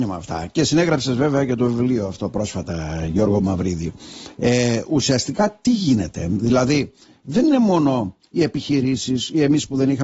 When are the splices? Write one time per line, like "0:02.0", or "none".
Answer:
none